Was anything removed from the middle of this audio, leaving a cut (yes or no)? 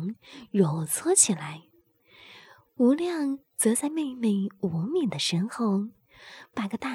no